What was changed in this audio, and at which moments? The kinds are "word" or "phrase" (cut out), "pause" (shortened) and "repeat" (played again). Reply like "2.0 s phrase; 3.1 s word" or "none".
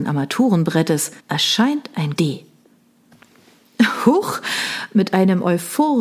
1.2 s pause; 2.2 s word